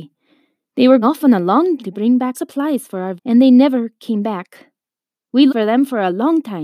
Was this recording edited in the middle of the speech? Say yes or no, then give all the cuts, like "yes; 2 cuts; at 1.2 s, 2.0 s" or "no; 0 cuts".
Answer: yes; 5 cuts; at 1.0 s, 1.8 s, 2.3 s, 3.2 s, 5.5 s